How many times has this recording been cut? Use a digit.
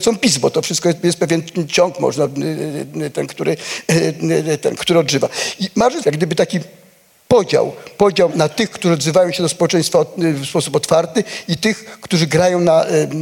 3